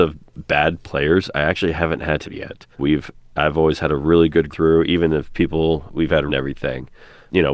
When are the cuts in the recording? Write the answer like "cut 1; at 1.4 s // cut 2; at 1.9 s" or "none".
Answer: cut 1; at 2.2 s // cut 2; at 2.7 s // cut 3; at 4.5 s // cut 4; at 6.3 s